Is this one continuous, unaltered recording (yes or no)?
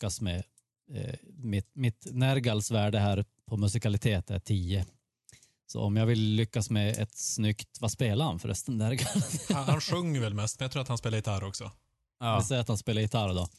yes